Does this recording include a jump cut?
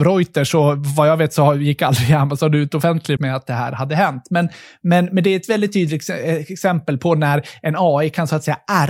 yes; 1 cut; at 3.2 s

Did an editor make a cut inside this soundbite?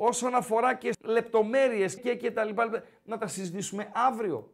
yes; 2 cuts; at 0.9 s, 2.0 s

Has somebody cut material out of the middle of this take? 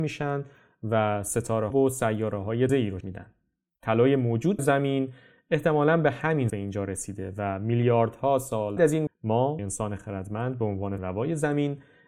yes; 9 cuts; at 1.7 s, 2.7 s, 3.0 s, 4.6 s, 6.5 s, 8.8 s, 9.1 s, 9.6 s, 11.0 s

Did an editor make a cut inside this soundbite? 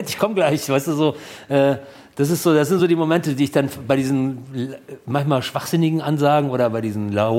no; 0 cuts

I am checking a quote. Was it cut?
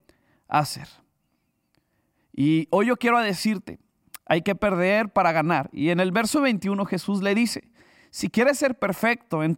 no; 0 cuts

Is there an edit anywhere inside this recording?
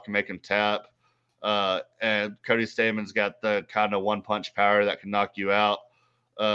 no; 0 cuts

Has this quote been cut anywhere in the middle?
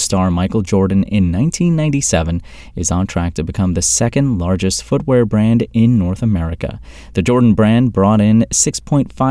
no; 0 cuts

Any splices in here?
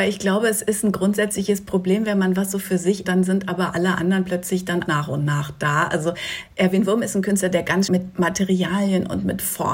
yes; 3 cuts; at 3.0 s, 4.9 s, 7.9 s

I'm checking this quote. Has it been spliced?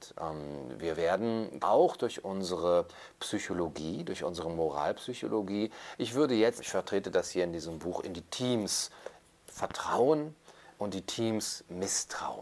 yes; 2 cuts; at 1.6 s, 6.6 s

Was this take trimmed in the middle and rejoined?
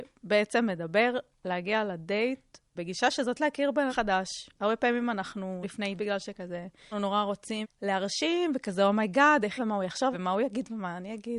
yes; 9 cuts; at 2.8 s, 3.4 s, 3.9 s, 5.6 s, 6.0 s, 6.9 s, 7.6 s, 9.6 s, 10.1 s

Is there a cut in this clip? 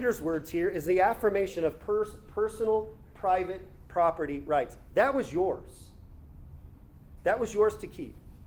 no; 0 cuts

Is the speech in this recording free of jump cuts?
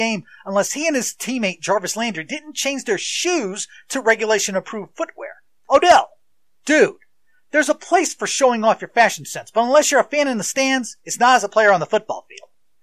yes; 0 cuts

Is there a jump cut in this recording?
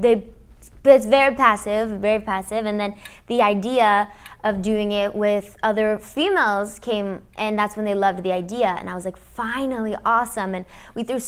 no; 0 cuts

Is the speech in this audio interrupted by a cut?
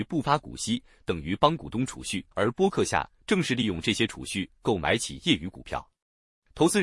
yes; 1 cut; at 2.3 s

